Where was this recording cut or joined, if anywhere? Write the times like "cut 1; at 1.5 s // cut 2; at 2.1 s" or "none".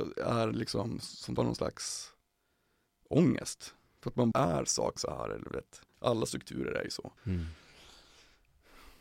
cut 1; at 1.4 s // cut 2; at 4.3 s // cut 3; at 5.0 s // cut 4; at 5.9 s // cut 5; at 7.2 s